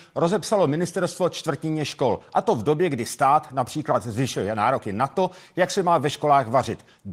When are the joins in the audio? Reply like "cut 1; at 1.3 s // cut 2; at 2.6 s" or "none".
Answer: none